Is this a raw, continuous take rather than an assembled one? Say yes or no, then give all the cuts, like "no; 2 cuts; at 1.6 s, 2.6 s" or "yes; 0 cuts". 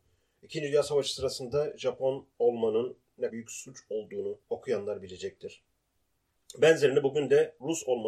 no; 3 cuts; at 2.3 s, 3.3 s, 4.4 s